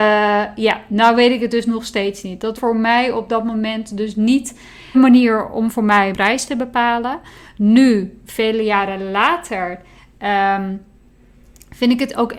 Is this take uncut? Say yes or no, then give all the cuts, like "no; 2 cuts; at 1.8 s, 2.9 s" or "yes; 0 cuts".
no; 3 cuts; at 2.6 s, 4.9 s, 6.1 s